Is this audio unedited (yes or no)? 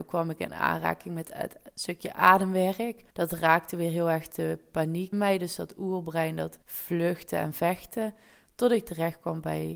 no